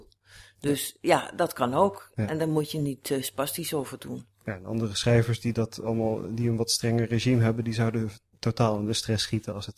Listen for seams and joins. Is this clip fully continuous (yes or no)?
yes